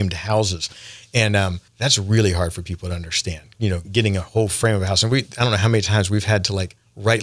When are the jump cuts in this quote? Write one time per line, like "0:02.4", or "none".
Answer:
0:01.7
0:03.8

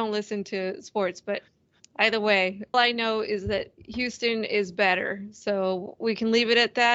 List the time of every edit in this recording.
0:02.7

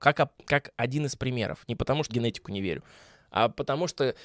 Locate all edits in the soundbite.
0:02.1

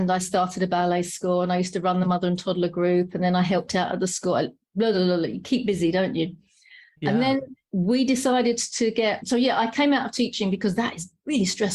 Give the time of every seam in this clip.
none

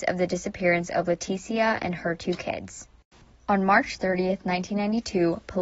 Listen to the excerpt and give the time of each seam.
none

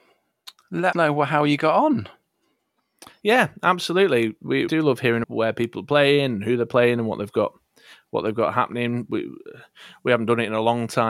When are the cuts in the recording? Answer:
0:00.9
0:04.7
0:05.2

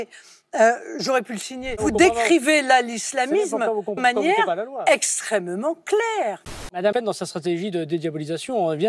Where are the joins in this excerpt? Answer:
0:04.0
0:06.9

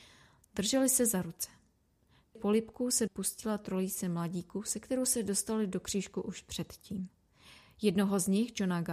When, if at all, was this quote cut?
0:02.4
0:03.1

